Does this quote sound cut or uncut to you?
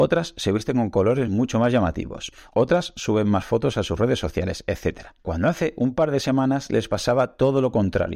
uncut